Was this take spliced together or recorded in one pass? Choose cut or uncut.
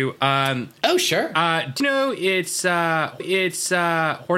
cut